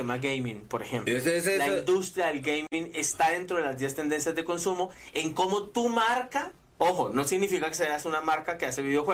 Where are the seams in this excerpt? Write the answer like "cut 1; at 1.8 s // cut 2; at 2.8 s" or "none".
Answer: cut 1; at 6.6 s